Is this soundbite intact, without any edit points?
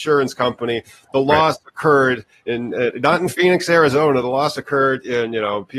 yes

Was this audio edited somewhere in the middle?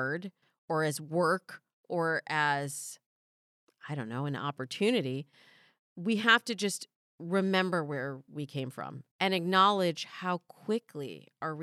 no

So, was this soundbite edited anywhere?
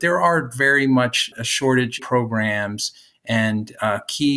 yes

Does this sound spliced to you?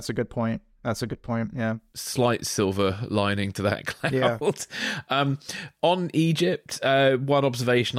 no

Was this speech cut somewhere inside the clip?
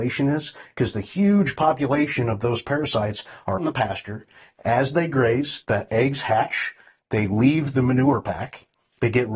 yes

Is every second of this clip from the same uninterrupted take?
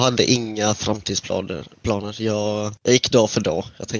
no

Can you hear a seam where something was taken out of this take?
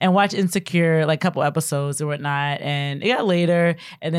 no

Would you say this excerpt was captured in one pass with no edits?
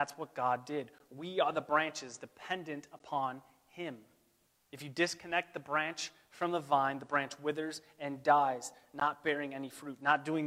no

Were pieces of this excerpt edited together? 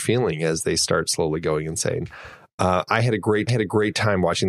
yes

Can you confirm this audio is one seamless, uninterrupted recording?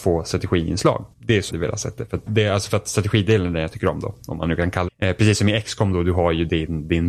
no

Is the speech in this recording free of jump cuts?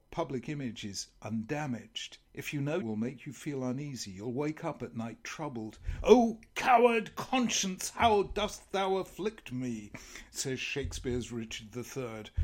no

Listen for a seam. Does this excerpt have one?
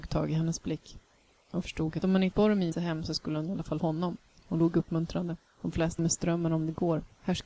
yes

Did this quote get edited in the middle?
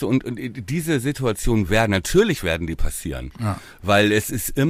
no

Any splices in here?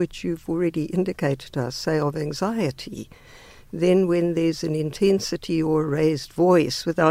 no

